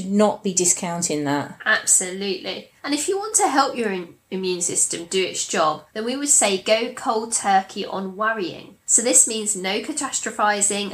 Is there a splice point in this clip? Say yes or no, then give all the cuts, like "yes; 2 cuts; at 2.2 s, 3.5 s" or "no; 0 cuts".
yes; 3 cuts; at 2.8 s, 5.9 s, 8.8 s